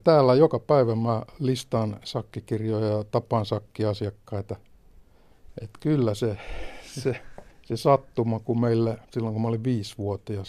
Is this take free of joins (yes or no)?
no